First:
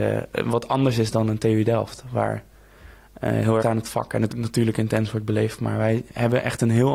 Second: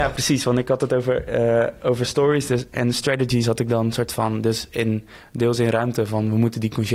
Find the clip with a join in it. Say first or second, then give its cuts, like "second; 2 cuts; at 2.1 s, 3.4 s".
first; 2 cuts; at 3.6 s, 4.3 s